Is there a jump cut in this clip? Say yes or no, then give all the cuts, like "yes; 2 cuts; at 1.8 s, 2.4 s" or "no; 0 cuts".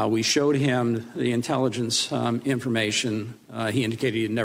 no; 0 cuts